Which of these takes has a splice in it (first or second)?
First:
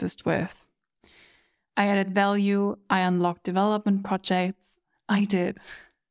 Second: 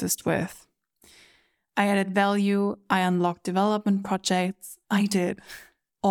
second